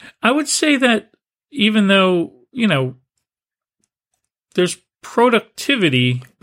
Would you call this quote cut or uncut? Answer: uncut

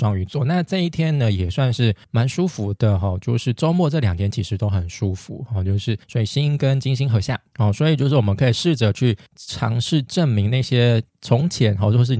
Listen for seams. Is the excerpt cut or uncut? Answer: cut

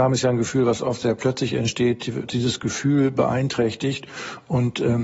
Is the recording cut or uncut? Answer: cut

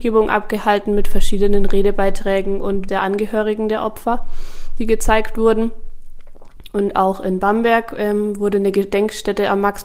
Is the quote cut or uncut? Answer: cut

